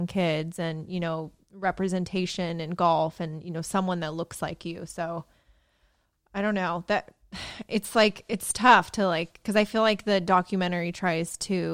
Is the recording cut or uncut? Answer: uncut